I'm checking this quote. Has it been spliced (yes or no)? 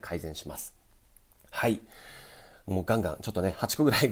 no